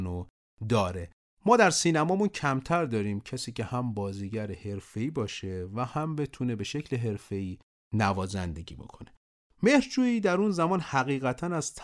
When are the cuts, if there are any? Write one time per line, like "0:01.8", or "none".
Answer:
none